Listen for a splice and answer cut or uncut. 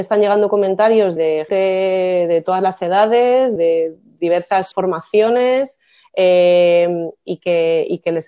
cut